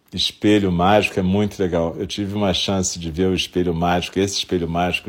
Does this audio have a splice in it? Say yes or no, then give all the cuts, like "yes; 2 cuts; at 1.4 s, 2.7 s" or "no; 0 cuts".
no; 0 cuts